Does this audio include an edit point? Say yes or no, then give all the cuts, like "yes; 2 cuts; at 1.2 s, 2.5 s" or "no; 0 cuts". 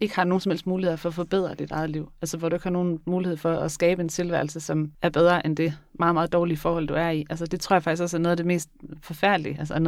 yes; 1 cut; at 4.9 s